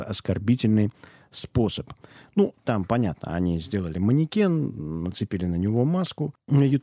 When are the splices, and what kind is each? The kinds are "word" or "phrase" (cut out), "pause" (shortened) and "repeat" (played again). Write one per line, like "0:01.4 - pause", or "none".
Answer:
none